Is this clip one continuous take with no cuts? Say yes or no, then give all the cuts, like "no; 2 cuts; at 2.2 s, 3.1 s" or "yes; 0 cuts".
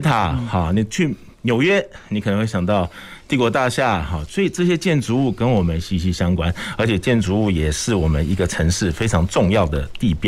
no; 1 cut; at 1.3 s